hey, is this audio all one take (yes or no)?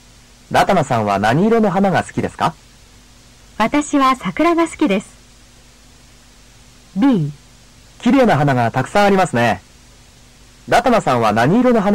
no